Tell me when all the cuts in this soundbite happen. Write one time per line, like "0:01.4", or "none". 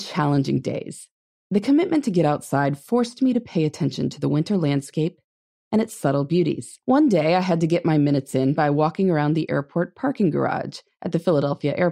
0:06.8